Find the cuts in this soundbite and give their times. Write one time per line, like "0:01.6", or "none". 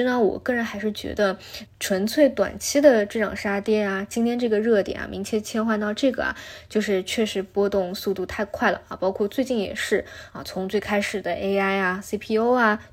0:01.7